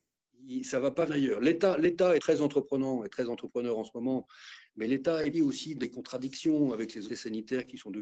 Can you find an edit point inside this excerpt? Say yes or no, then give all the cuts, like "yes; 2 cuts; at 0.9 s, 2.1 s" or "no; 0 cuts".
yes; 5 cuts; at 1.1 s, 2.2 s, 5.3 s, 5.8 s, 7.1 s